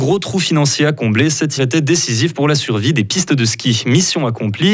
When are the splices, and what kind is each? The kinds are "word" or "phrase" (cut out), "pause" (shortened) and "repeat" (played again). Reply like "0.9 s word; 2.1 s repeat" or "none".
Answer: 1.6 s word